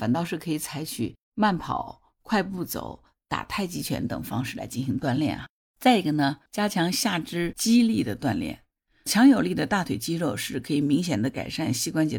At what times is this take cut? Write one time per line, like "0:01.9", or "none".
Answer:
0:01.2
0:06.5